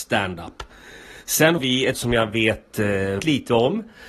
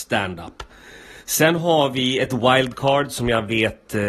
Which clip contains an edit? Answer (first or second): first